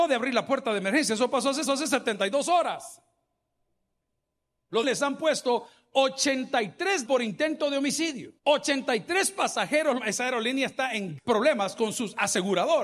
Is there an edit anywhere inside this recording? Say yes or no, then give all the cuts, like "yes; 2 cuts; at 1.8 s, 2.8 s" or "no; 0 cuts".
yes; 6 cuts; at 1.7 s, 4.8 s, 7.0 s, 8.4 s, 10.0 s, 11.2 s